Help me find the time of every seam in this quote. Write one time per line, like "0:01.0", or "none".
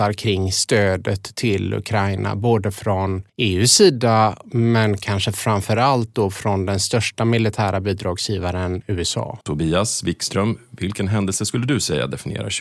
0:03.3
0:09.4